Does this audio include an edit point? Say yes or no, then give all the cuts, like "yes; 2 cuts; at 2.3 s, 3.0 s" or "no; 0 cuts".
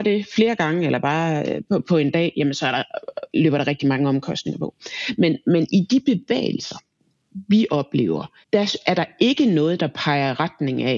no; 0 cuts